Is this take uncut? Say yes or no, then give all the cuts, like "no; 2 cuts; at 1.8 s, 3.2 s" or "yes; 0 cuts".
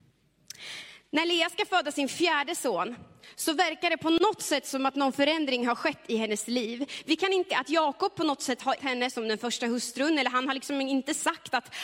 no; 2 cuts; at 7.5 s, 8.8 s